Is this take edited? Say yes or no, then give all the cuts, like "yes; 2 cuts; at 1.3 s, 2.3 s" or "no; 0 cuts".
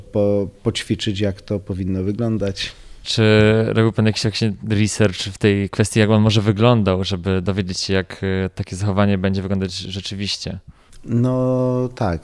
no; 0 cuts